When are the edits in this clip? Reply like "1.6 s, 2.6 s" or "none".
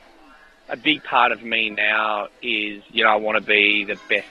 2.9 s